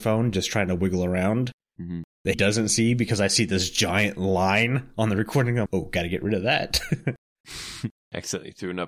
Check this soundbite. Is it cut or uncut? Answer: cut